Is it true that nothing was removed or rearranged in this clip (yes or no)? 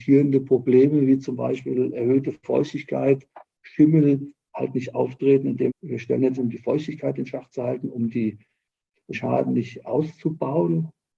no